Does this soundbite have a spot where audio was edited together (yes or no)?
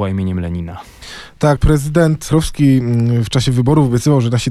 yes